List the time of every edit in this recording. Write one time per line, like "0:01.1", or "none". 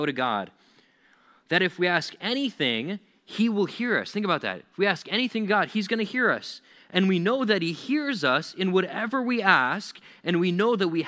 none